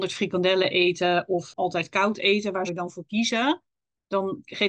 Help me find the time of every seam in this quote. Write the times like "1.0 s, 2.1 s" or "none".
2.7 s